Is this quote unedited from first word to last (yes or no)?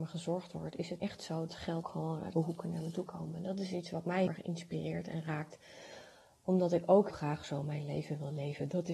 no